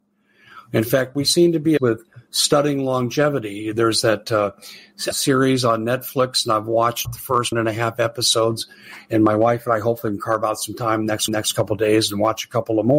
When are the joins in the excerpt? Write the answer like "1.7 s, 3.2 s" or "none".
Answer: 1.8 s, 5.1 s, 7.0 s, 7.5 s, 11.3 s